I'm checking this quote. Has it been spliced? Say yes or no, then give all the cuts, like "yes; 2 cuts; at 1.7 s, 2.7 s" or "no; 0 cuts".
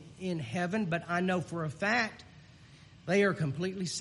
no; 0 cuts